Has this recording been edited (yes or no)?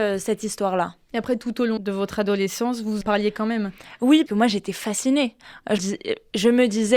yes